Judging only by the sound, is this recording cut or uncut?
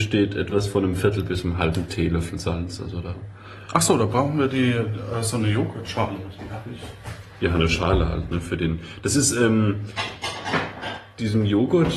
uncut